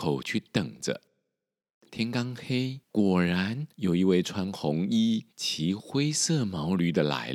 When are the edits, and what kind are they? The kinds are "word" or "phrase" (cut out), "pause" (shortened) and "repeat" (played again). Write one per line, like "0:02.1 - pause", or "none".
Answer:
0:02.8 - pause
0:03.7 - pause
0:05.3 - pause